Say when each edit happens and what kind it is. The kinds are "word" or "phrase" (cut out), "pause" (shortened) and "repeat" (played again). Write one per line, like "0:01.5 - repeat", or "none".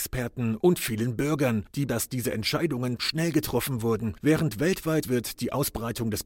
0:01.9 - word
0:03.0 - word
0:05.0 - word

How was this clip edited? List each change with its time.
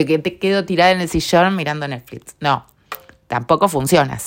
none

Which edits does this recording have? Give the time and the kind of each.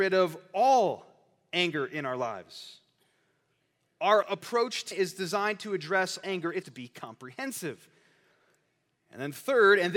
0:04.2 - word
0:04.9 - word
0:06.2 - word
0:06.6 - word

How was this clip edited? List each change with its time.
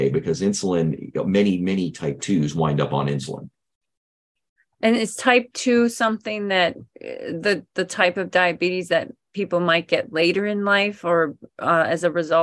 none

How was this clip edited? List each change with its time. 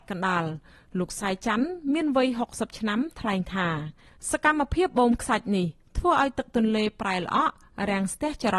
none

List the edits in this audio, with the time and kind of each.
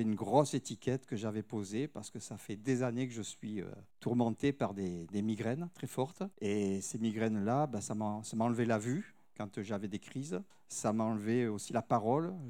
0:03.9 - pause
0:06.3 - pause
0:10.5 - pause

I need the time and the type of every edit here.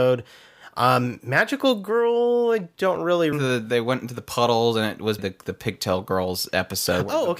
0:03.3 - phrase
0:05.2 - word

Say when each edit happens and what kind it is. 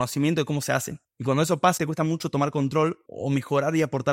0:01.8 - word
0:03.1 - word

